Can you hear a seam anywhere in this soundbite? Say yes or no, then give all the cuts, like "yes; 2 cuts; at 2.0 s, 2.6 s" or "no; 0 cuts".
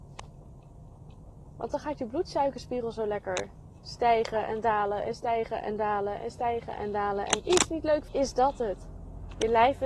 yes; 2 cuts; at 7.4 s, 8.1 s